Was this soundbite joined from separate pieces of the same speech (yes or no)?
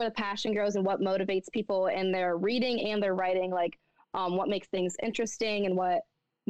no